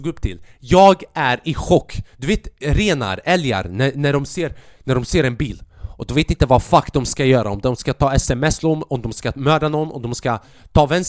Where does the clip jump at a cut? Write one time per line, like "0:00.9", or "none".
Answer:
0:02.1